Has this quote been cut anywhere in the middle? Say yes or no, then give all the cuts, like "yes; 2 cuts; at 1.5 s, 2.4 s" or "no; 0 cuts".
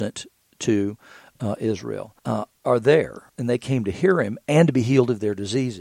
yes; 2 cuts; at 2.2 s, 3.3 s